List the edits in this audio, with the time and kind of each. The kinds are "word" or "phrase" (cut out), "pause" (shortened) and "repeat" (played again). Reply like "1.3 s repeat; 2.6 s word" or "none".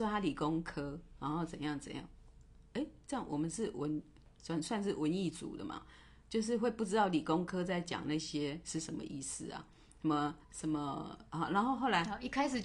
10.4 s pause